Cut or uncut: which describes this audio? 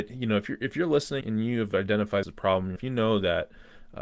cut